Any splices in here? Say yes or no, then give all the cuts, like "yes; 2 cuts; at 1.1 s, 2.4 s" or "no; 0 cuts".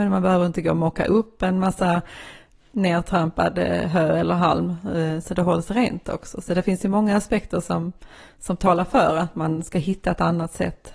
no; 0 cuts